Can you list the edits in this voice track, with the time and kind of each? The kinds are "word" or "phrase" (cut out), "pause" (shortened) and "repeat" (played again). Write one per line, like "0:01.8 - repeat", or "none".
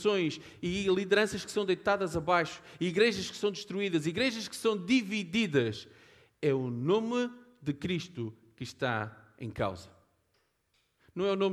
none